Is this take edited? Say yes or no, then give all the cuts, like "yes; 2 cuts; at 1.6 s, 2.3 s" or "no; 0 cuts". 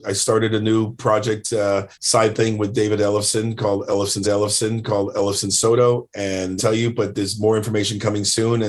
yes; 3 cuts; at 1.9 s, 4.2 s, 6.6 s